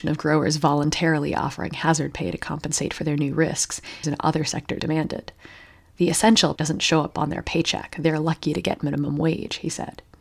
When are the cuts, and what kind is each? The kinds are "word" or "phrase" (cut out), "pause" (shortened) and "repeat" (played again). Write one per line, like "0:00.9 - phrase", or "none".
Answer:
0:04.0 - phrase
0:04.8 - word
0:06.6 - word

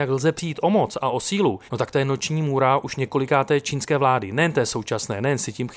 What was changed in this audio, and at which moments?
0:01.7 - pause

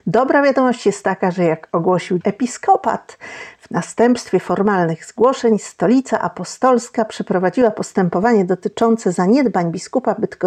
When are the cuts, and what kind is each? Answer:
0:02.2 - word

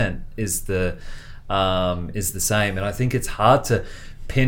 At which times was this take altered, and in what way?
none

